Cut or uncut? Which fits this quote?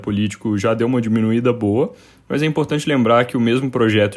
uncut